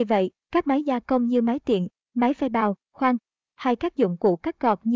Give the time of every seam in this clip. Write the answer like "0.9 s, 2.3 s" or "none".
none